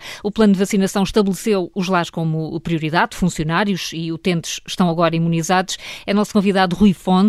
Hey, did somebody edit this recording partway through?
no; 0 cuts

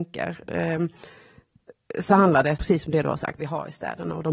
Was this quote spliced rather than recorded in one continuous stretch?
yes; 2 cuts; at 2.6 s, 3.4 s

